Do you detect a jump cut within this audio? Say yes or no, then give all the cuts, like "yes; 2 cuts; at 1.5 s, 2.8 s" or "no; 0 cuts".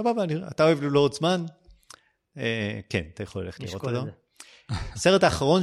no; 0 cuts